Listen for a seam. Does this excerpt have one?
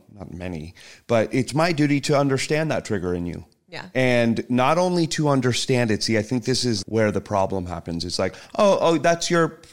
yes; 1 cut; at 6.8 s

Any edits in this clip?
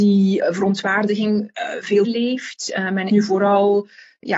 yes; 2 cuts; at 2.0 s, 3.1 s

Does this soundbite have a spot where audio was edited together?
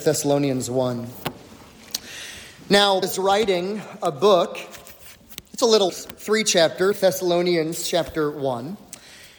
yes; 3 cuts; at 3.0 s, 5.9 s, 6.9 s

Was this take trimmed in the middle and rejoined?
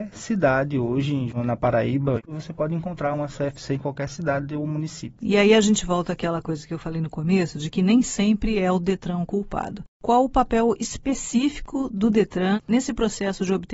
no; 0 cuts

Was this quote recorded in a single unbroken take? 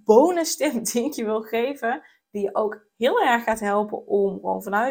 yes; 0 cuts

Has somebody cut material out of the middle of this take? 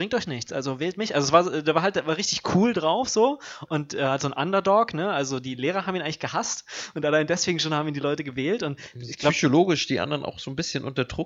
no; 0 cuts

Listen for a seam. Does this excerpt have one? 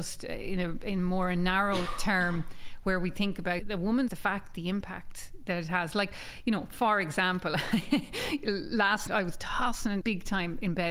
yes; 4 cuts; at 3.6 s, 4.1 s, 9.1 s, 10.0 s

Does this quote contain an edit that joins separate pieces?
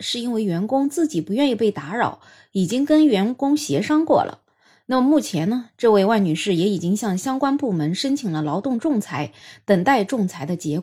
no; 0 cuts

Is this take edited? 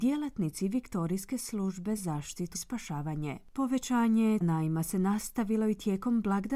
yes; 3 cuts; at 2.0 s, 2.5 s, 4.4 s

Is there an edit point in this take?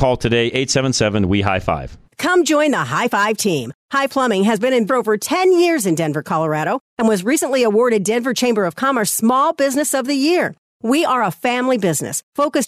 yes; 3 cuts; at 2.1 s, 4.1 s, 4.9 s

